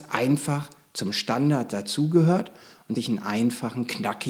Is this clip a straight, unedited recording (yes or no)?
no